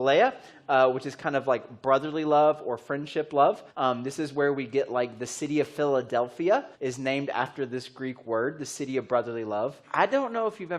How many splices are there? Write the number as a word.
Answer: three